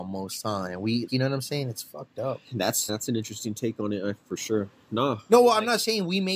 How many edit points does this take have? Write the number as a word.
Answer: two